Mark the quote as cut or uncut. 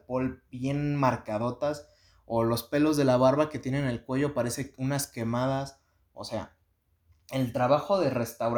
uncut